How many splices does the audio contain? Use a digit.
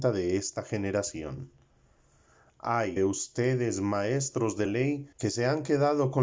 3